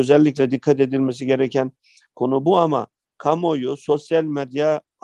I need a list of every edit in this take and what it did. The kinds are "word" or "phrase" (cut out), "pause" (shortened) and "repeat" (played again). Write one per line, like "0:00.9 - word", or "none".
none